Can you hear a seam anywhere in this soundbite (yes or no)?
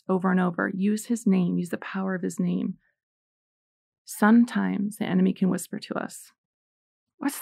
no